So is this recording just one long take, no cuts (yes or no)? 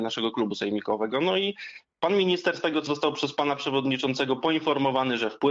no